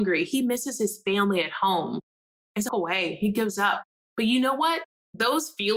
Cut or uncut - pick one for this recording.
cut